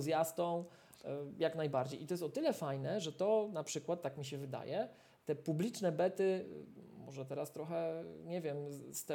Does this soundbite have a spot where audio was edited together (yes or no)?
no